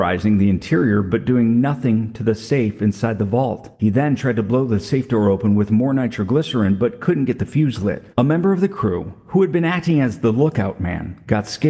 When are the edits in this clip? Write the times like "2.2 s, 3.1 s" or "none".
3.7 s, 8.1 s

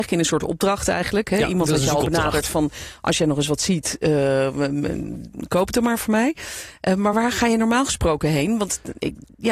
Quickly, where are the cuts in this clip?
none

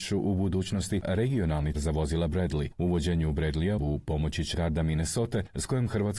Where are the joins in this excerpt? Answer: 1.0 s, 1.7 s, 3.8 s, 4.5 s

